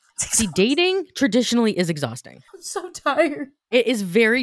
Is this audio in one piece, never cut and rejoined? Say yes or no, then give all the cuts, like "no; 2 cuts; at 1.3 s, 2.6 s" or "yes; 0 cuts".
no; 1 cut; at 2.5 s